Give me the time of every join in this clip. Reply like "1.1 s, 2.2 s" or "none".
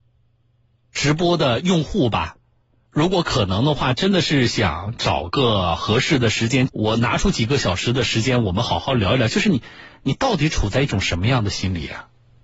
2.9 s, 6.7 s

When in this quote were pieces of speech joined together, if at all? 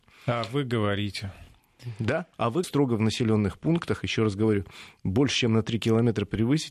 2.3 s, 2.6 s

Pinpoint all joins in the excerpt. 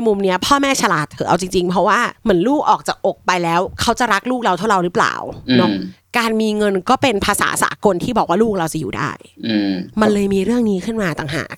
2.2 s

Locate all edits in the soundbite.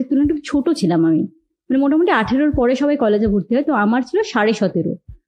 none

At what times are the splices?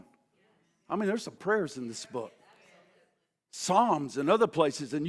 1.4 s

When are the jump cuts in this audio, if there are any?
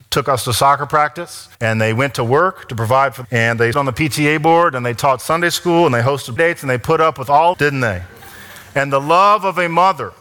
1.5 s, 3.2 s, 3.7 s, 6.4 s, 7.5 s

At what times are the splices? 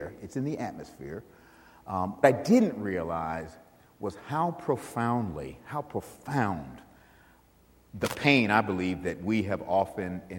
2.2 s, 7.6 s

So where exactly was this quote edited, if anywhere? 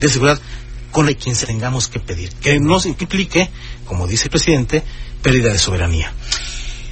1.1 s, 1.4 s, 3.0 s, 3.8 s, 4.2 s, 5.2 s

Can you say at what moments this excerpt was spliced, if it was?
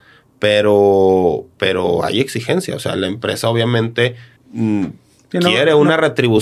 4.4 s

